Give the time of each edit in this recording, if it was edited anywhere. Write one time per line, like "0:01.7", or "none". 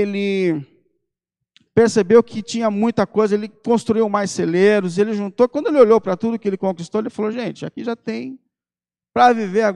none